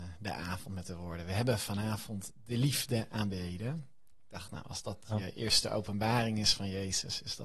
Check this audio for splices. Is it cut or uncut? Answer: uncut